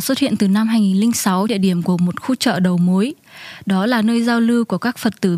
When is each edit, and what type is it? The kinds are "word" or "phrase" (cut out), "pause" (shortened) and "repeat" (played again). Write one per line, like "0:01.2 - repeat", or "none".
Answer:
0:01.5 - word